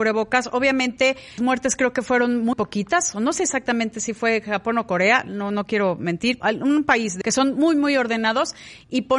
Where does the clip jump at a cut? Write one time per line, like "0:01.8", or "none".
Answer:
0:01.4
0:02.5
0:06.4
0:07.2